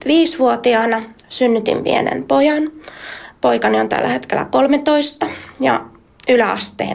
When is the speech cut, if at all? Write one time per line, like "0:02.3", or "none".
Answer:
0:01.2